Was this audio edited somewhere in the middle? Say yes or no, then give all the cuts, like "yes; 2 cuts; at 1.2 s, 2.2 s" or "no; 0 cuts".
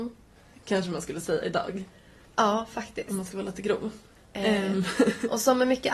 no; 0 cuts